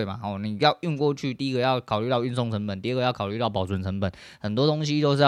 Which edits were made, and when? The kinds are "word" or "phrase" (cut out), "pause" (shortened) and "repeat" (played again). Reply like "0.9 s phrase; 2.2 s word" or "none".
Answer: none